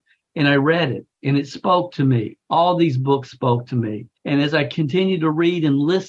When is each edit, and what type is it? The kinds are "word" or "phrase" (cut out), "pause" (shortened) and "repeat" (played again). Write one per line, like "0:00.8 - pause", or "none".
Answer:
0:02.4 - pause
0:04.2 - pause